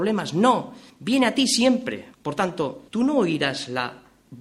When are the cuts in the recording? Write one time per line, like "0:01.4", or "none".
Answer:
0:02.1
0:02.9